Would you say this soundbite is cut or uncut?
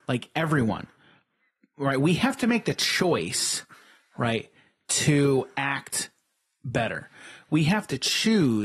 uncut